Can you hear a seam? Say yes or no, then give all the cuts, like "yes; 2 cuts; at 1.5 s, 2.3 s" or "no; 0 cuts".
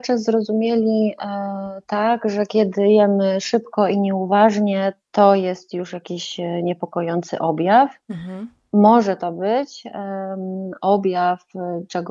no; 0 cuts